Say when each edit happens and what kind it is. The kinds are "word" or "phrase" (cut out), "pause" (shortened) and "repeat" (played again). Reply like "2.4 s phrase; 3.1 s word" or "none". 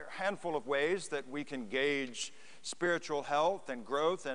none